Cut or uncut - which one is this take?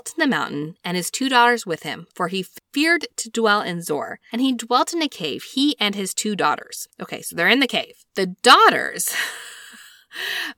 cut